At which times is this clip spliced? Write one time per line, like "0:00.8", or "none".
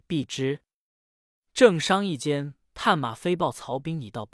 0:02.6